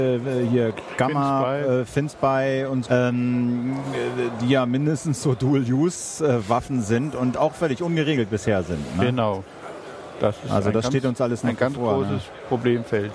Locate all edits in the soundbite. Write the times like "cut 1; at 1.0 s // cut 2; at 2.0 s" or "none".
cut 1; at 2.8 s